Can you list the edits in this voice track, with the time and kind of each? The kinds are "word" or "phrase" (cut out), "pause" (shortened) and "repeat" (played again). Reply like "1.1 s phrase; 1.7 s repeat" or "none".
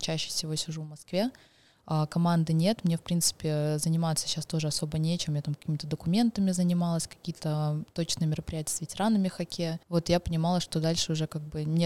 9.8 s pause